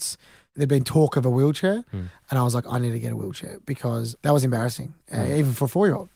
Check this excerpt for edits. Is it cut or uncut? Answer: uncut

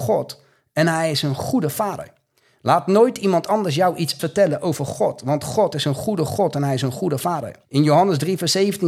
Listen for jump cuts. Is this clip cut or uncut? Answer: cut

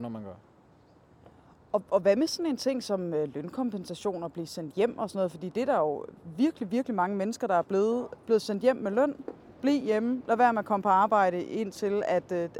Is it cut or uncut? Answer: uncut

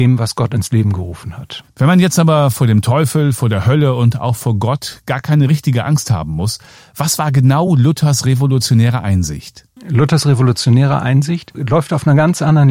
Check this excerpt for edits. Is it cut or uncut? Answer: uncut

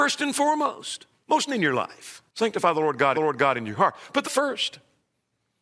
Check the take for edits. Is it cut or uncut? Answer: cut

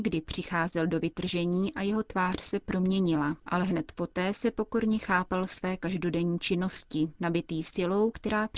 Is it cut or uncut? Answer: cut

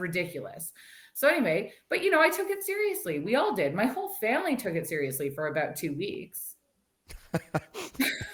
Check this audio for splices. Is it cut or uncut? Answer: uncut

